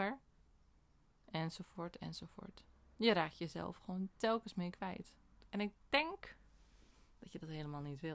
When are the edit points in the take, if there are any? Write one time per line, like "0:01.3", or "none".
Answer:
none

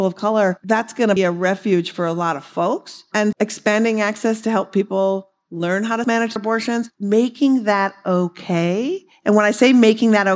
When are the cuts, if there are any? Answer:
0:01.2
0:03.3
0:06.0
0:06.4

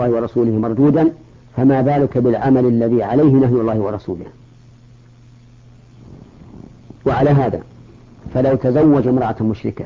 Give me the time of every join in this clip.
0:01.4
0:07.0

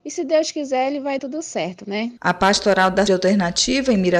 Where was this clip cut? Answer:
0:01.2
0:02.2
0:03.1

